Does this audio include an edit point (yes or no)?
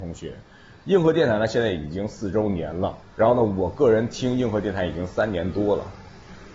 yes